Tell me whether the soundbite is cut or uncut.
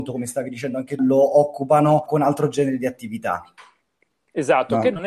cut